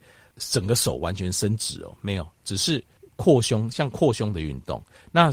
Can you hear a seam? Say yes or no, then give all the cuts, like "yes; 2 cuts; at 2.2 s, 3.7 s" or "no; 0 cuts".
yes; 1 cut; at 3.0 s